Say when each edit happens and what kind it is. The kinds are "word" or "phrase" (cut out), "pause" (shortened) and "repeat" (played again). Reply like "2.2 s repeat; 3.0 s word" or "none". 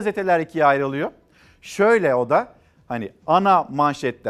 none